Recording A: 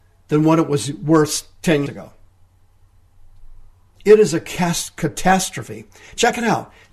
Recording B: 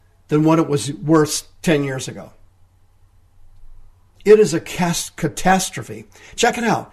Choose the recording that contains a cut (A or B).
A